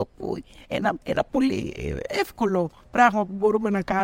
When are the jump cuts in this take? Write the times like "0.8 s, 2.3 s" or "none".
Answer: 1.0 s

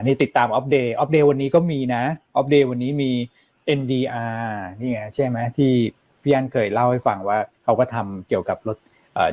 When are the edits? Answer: 7.5 s

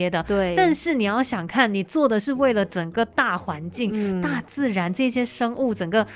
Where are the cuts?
none

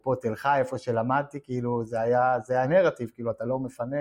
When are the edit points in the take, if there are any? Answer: 2.6 s

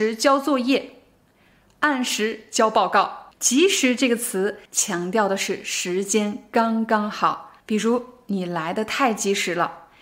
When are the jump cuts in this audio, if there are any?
3.3 s, 4.7 s, 7.6 s

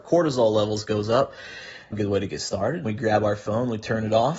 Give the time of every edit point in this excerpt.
1.9 s, 2.8 s

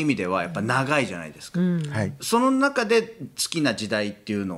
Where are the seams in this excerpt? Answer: none

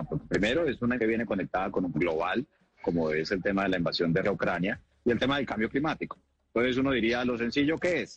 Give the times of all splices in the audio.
1.0 s, 1.9 s, 4.2 s

